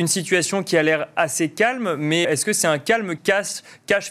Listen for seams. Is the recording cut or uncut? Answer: cut